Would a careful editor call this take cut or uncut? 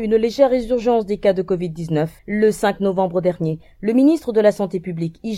cut